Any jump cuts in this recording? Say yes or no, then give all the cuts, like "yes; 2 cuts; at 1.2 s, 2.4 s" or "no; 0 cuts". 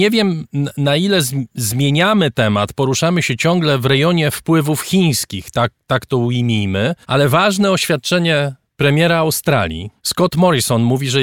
yes; 2 cuts; at 7.0 s, 10.0 s